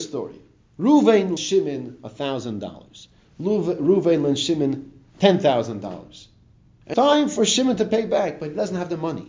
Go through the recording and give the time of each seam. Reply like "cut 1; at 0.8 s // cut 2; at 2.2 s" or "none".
cut 1; at 1.4 s // cut 2; at 6.9 s